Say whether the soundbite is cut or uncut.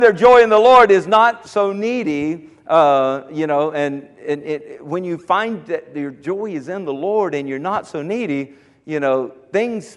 uncut